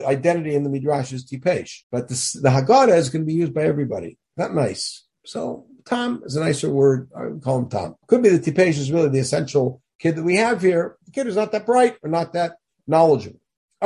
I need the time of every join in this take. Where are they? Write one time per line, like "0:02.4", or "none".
0:01.8
0:08.0